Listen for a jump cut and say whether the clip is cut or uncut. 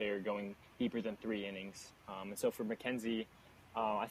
uncut